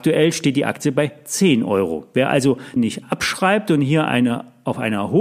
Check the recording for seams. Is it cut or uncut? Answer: cut